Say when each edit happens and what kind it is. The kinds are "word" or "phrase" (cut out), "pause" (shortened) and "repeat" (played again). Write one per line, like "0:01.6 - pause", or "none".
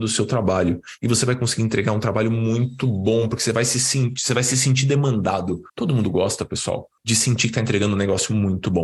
0:05.7 - pause
0:07.0 - pause